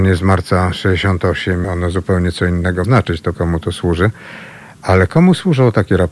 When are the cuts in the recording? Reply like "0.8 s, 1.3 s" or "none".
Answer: 1.6 s, 2.8 s, 3.3 s